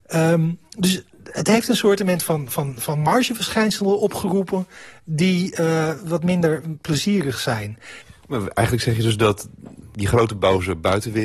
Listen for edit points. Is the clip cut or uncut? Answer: uncut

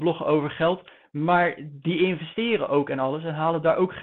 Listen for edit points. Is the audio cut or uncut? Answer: uncut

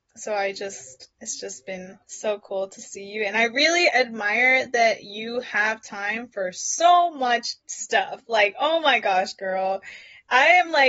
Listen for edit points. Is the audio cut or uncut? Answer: cut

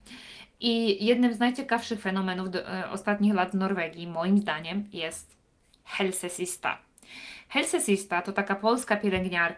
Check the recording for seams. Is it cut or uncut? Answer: uncut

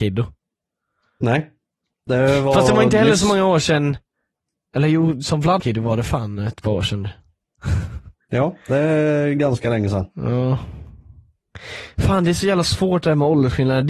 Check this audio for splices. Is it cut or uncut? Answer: cut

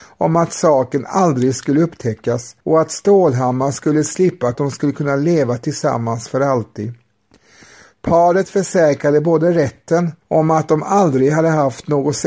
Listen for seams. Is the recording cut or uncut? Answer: cut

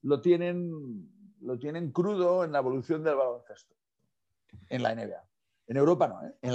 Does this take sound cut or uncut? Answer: uncut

